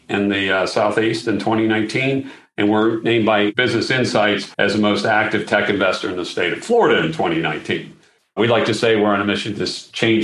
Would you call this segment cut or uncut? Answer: cut